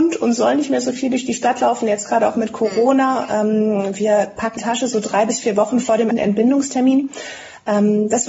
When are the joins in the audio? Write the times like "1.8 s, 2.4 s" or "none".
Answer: 4.6 s, 6.1 s